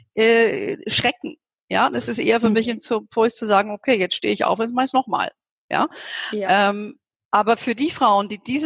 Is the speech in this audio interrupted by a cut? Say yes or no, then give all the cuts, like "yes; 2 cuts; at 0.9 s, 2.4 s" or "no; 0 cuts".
no; 0 cuts